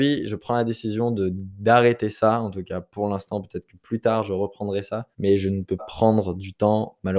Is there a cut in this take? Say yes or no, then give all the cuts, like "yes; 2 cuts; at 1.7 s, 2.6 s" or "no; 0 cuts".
yes; 2 cuts; at 5.1 s, 5.8 s